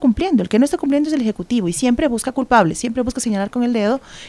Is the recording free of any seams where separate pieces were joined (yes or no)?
yes